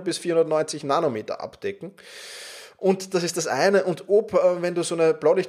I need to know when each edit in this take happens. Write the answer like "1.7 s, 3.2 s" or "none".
none